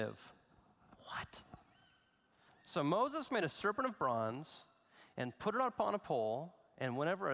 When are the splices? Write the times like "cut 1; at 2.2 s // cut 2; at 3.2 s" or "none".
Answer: none

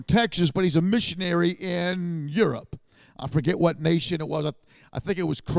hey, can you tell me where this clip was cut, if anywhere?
none

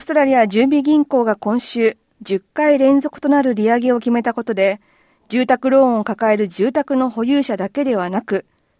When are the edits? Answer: none

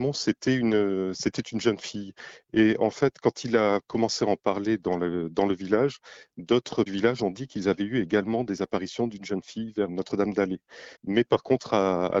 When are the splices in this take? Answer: cut 1; at 6.9 s // cut 2; at 9.9 s // cut 3; at 11.0 s

